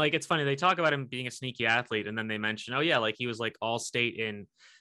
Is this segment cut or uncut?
uncut